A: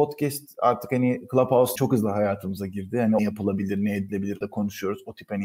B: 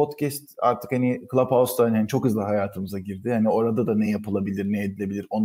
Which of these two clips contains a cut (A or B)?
A